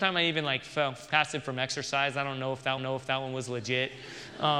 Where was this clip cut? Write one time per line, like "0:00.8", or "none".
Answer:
0:02.8